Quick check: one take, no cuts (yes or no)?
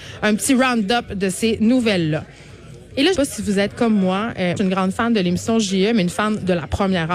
no